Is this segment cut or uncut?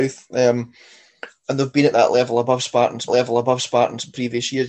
cut